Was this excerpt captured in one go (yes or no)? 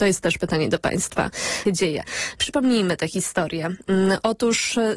no